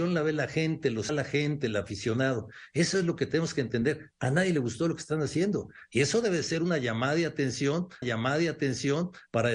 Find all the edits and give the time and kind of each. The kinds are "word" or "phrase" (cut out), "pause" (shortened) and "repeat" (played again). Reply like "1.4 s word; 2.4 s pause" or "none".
1.1 s phrase; 8.0 s repeat